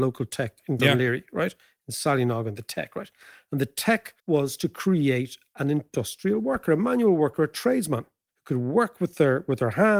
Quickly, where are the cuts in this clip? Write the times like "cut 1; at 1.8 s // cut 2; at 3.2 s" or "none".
cut 1; at 4.2 s